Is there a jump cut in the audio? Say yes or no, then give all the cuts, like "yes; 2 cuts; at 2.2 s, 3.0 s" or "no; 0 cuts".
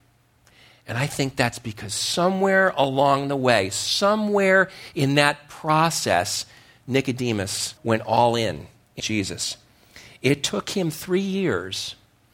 yes; 2 cuts; at 7.8 s, 9.0 s